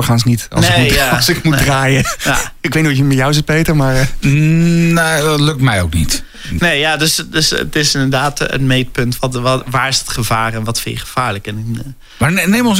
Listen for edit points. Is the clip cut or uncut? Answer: uncut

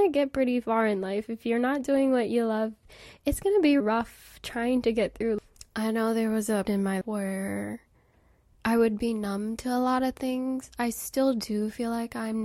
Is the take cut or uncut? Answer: cut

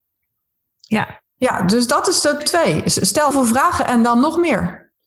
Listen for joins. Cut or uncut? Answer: cut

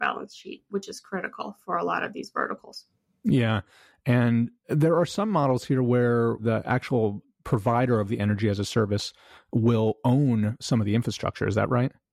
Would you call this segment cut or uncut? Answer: cut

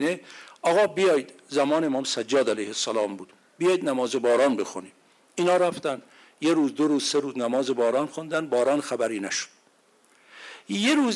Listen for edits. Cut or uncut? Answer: uncut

